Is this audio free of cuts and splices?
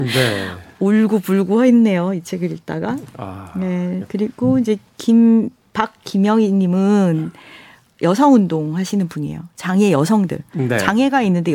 yes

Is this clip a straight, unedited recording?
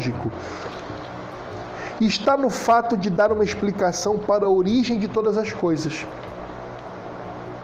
yes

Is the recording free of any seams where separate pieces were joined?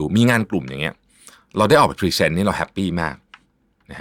yes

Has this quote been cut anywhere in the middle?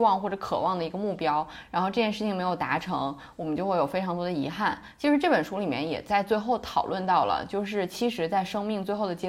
no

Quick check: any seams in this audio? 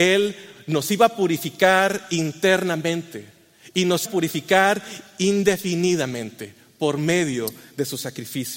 yes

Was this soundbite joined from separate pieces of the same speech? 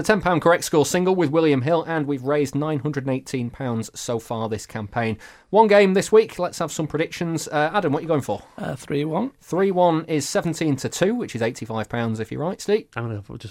no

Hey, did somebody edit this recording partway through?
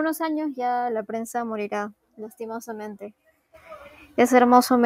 no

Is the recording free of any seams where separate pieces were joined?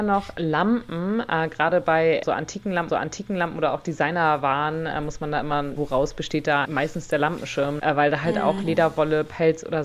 no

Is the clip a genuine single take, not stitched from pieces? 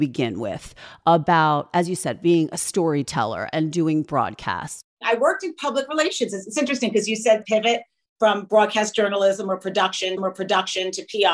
no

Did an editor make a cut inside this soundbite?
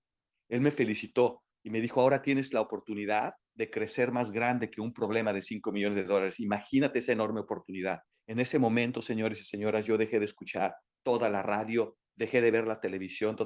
yes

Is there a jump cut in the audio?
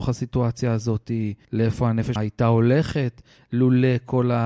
yes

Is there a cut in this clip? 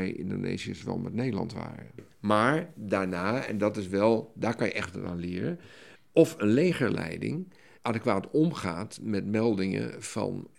no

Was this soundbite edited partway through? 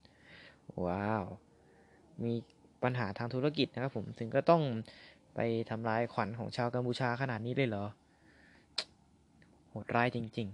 no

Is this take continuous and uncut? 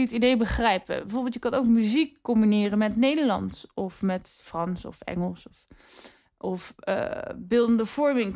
yes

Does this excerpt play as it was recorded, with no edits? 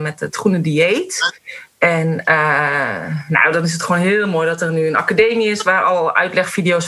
yes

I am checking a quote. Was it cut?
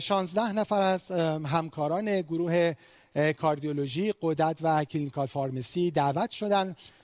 no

